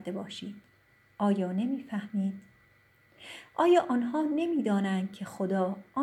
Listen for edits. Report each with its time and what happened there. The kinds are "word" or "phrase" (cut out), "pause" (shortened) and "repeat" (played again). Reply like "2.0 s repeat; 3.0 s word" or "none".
none